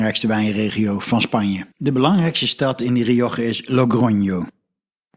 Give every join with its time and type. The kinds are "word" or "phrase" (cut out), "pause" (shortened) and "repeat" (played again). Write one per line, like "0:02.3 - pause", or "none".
0:01.7 - pause